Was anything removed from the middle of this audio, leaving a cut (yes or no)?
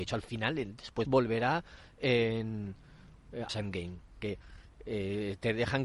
yes